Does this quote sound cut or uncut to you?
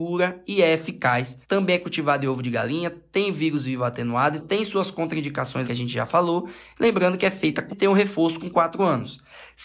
cut